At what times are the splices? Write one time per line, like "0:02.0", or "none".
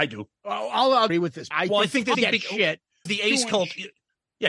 0:01.1
0:01.5
0:02.1
0:03.1